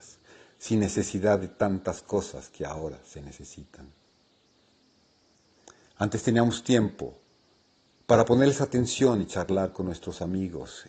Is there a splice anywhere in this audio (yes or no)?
no